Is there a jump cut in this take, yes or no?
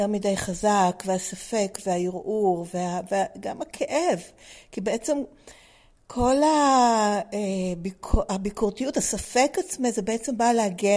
no